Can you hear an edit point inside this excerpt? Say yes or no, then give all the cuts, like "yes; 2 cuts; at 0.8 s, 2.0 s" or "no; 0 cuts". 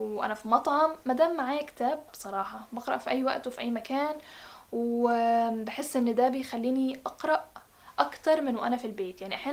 yes; 1 cut; at 2.1 s